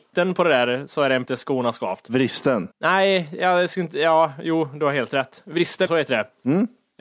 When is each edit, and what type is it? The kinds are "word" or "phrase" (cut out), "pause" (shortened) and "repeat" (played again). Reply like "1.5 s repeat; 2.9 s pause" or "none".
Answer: 1.2 s word; 2.7 s pause; 5.9 s word